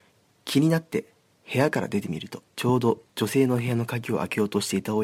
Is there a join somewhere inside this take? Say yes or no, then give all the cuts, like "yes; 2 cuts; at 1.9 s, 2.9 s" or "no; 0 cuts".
yes; 2 cuts; at 2.5 s, 3.1 s